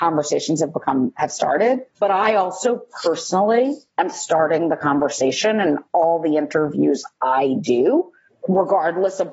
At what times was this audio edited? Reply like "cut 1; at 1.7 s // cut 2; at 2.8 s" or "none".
cut 1; at 1.9 s // cut 2; at 8.3 s